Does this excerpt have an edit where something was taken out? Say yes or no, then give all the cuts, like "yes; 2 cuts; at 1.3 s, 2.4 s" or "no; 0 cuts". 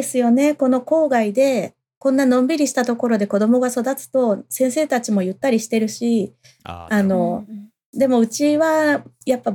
no; 0 cuts